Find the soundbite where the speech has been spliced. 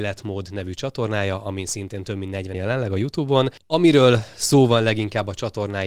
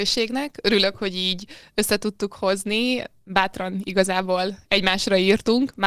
first; 1 cut; at 2.5 s

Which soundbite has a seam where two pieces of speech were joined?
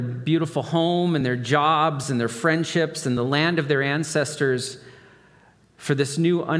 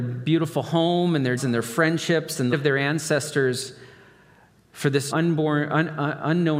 second; 3 cuts; at 1.4 s, 2.5 s, 5.1 s

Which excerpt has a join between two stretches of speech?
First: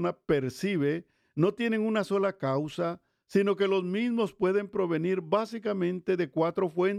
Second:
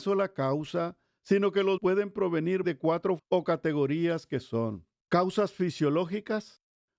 second; 3 cuts; at 1.8 s, 2.6 s, 3.2 s

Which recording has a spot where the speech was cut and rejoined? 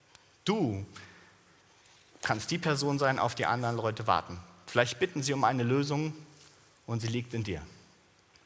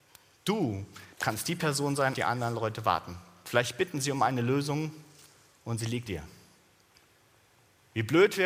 second; 3 cuts; at 1.1 s, 2.1 s, 6.1 s

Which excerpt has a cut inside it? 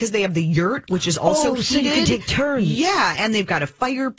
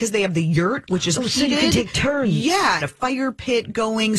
second; 2 cuts; at 1.2 s, 2.8 s

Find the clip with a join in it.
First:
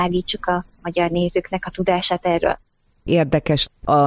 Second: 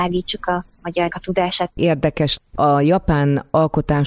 second; 2 cuts; at 1.1 s, 1.7 s

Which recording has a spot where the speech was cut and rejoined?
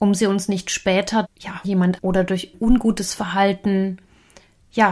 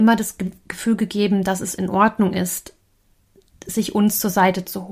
first; 4 cuts; at 1.2 s, 1.6 s, 2.0 s, 2.5 s

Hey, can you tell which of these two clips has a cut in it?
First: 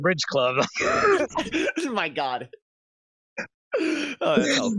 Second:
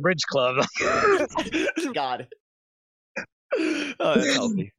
second; 1 cut; at 1.9 s

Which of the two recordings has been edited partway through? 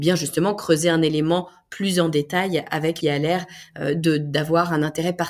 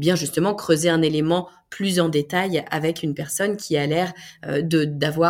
first; 1 cut; at 3.0 s

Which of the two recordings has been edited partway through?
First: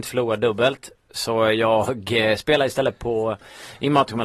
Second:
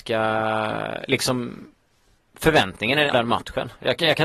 second; 1 cut; at 3.1 s

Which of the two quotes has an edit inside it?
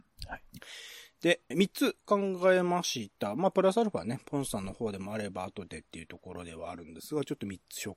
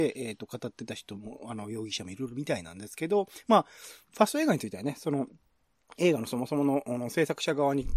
first; 1 cut; at 1.5 s

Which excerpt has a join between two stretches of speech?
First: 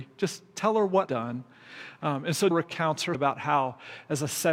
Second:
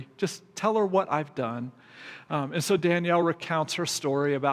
first; 3 cuts; at 1.1 s, 2.5 s, 3.1 s

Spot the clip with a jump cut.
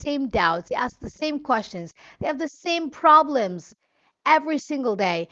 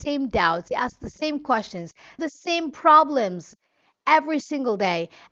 second; 1 cut; at 2.2 s

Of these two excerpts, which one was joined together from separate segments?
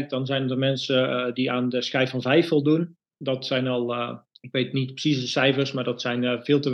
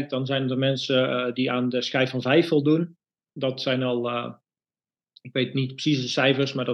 first; 2 cuts; at 3.1 s, 4.3 s

